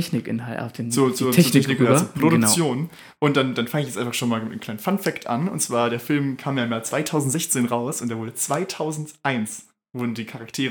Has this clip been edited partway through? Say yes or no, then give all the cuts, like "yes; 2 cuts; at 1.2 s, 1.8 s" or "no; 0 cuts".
no; 0 cuts